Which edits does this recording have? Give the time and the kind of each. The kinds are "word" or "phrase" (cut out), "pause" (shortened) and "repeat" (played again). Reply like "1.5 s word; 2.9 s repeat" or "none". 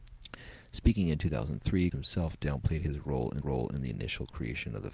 1.9 s word; 3.4 s repeat

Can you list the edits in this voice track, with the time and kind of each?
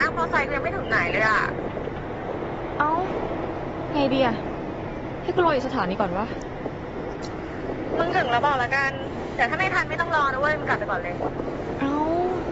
none

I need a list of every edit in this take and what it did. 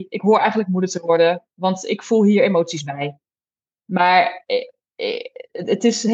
none

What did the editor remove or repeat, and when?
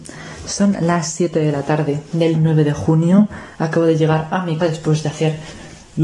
2.3 s word; 4.6 s word

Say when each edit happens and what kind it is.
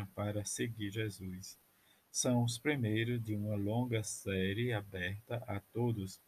none

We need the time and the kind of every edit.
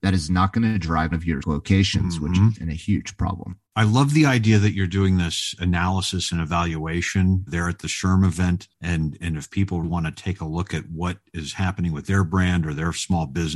1.1 s phrase; 1.4 s word; 2.5 s phrase; 3.7 s pause; 7.5 s word; 8.7 s pause; 9.8 s word

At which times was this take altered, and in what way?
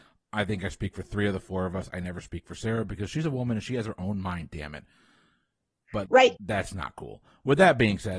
6.1 s word; 6.4 s word

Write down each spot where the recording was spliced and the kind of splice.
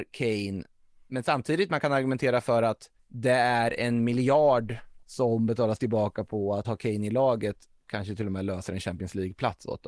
3.0 s pause; 5.0 s pause; 6.6 s word

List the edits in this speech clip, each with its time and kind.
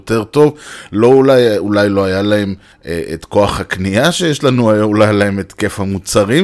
2.7 s pause

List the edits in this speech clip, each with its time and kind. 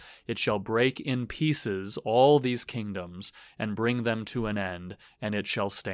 none

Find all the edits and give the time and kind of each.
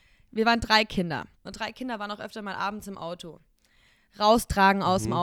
1.4 s pause

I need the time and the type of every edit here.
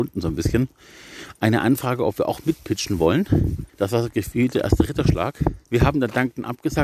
3.7 s pause; 5.6 s pause

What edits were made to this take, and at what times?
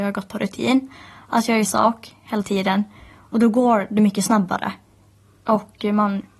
1.7 s word

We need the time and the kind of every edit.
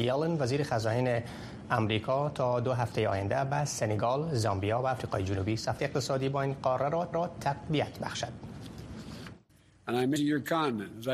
5.8 s phrase; 7.1 s repeat; 9.5 s pause; 10.2 s phrase

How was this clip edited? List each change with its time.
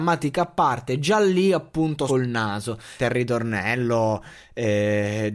2.1 s word; 3.0 s phrase

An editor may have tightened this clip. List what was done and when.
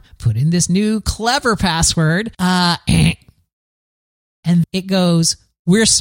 2.3 s pause; 4.6 s word

